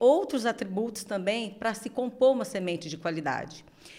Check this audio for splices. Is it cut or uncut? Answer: uncut